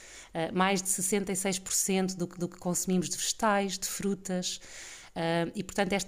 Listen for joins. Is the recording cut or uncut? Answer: cut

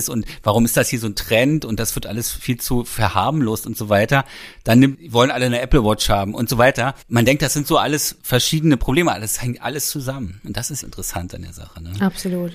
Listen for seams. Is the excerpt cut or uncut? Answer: cut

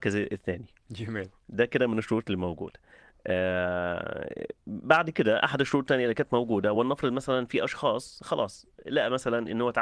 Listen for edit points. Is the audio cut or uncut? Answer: uncut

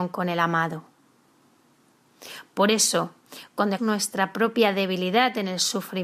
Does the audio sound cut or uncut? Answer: cut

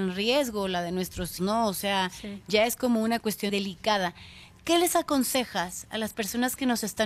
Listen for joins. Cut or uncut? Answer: cut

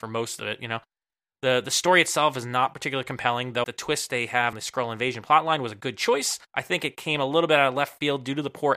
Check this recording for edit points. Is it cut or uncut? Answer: cut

